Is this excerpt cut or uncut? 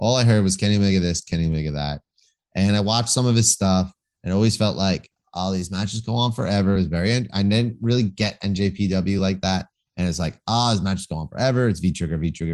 uncut